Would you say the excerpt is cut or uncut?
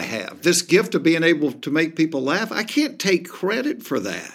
uncut